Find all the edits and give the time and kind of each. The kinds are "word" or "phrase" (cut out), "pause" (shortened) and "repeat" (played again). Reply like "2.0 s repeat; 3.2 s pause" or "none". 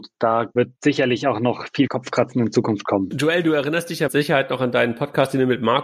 4.1 s word